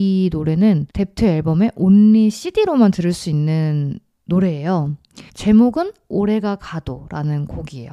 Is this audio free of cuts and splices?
no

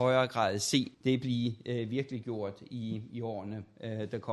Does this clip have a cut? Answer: yes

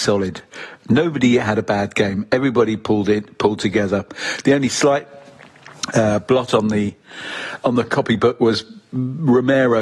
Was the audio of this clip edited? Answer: no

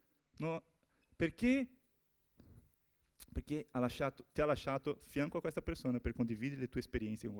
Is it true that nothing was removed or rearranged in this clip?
yes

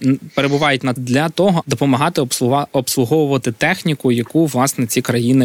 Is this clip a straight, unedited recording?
no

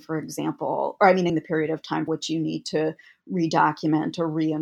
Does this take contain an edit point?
yes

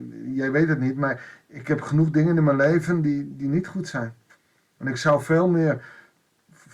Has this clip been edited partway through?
no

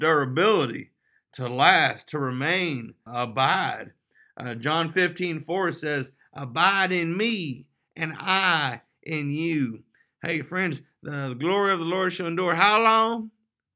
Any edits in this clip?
yes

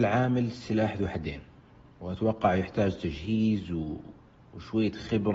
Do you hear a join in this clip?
no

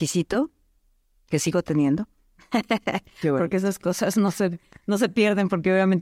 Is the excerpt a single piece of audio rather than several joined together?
yes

